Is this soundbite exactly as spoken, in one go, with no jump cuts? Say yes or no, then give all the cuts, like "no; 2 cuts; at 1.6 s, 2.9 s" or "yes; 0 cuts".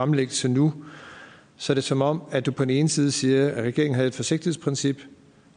yes; 0 cuts